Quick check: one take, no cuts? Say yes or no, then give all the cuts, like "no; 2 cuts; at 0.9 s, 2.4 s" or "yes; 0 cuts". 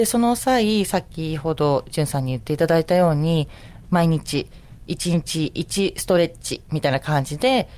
yes; 0 cuts